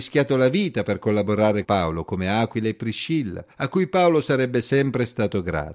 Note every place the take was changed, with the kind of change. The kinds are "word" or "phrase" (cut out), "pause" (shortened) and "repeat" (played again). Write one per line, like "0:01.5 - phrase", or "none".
0:01.6 - word
0:03.5 - pause